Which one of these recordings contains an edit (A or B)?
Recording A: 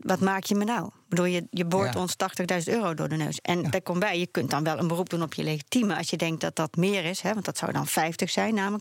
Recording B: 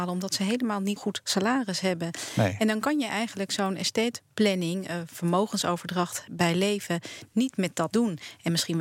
B